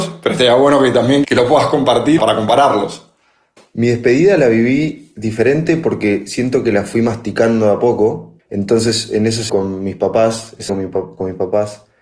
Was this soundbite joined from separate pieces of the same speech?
yes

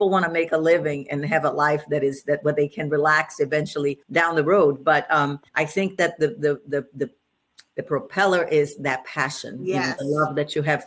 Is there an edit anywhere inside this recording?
yes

